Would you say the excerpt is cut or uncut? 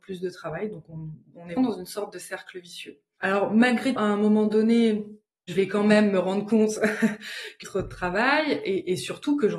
cut